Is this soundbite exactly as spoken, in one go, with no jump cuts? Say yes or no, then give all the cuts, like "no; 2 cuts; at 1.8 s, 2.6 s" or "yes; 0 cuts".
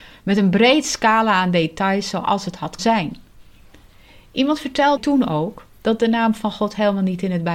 no; 2 cuts; at 2.8 s, 5.0 s